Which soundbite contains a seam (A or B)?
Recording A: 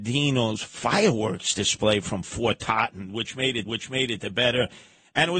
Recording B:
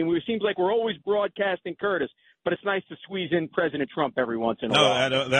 A